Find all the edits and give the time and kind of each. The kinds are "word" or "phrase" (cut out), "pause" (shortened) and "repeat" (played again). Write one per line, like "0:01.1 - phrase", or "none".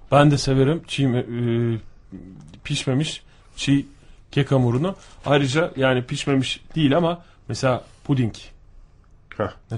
none